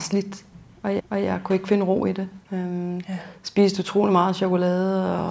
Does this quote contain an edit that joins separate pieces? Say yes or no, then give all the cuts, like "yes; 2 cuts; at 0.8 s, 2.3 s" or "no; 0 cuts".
yes; 2 cuts; at 1.0 s, 2.4 s